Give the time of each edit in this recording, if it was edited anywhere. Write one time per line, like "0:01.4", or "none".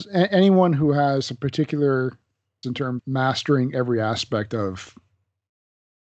0:02.6
0:03.0